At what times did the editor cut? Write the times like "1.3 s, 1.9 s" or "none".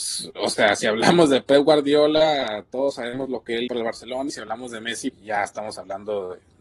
3.7 s, 4.3 s, 5.1 s